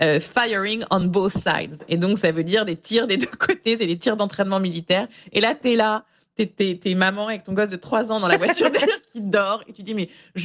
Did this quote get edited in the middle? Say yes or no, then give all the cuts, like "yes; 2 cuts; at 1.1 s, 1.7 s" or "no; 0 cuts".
no; 0 cuts